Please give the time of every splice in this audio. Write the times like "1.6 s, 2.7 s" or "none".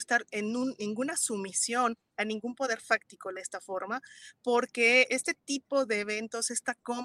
3.4 s, 5.1 s